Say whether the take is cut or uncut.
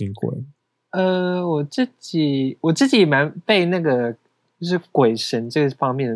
uncut